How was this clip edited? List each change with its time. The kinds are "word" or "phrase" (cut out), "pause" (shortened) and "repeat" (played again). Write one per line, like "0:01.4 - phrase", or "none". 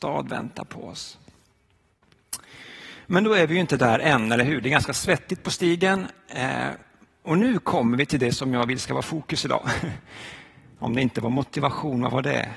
none